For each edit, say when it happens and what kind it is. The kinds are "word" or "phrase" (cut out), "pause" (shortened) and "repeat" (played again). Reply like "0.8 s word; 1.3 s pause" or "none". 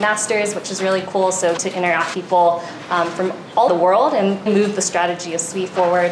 1.6 s word; 2.1 s word; 3.7 s word; 4.5 s word